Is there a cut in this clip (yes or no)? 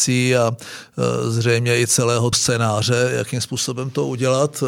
yes